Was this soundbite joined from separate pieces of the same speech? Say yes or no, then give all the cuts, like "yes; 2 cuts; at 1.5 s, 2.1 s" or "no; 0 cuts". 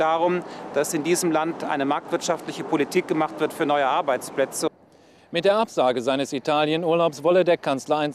no; 0 cuts